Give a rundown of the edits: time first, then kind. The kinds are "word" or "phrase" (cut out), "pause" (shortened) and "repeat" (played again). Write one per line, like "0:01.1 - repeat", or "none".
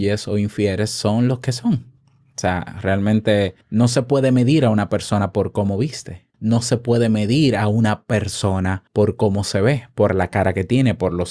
0:02.0 - pause
0:03.6 - pause
0:06.3 - pause
0:08.9 - pause